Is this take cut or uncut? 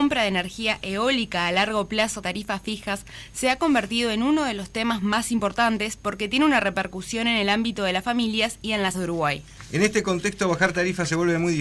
cut